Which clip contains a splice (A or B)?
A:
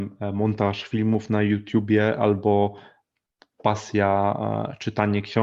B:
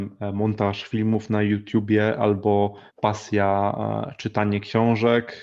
B